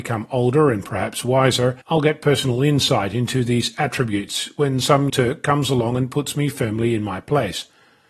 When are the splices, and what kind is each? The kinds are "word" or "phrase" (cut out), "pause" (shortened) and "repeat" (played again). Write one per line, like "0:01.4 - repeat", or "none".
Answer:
0:01.8 - pause
0:05.1 - word